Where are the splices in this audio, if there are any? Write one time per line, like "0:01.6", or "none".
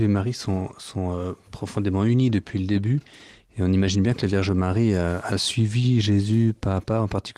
none